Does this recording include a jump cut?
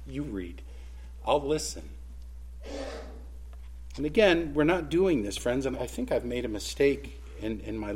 yes; 1 cut; at 5.7 s

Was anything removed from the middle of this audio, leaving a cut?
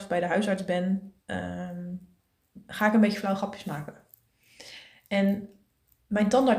yes; 1 cut; at 1.2 s

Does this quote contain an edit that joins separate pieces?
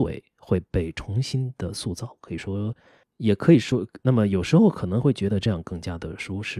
no; 0 cuts

